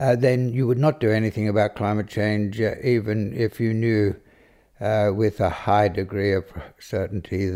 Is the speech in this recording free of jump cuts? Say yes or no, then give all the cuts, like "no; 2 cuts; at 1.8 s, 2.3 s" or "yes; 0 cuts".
yes; 0 cuts